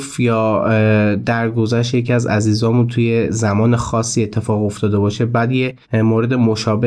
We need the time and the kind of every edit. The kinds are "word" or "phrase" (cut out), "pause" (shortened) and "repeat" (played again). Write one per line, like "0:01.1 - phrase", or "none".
0:05.8 - pause